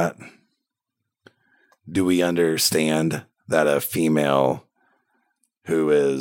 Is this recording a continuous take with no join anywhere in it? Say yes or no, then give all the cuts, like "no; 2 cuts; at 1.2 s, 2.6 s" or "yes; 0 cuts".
yes; 0 cuts